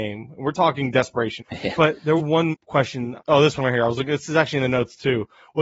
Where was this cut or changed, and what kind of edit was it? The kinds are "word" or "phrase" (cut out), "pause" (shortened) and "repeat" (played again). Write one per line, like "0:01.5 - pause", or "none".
0:01.4 - word
0:02.2 - word
0:02.5 - word
0:03.2 - word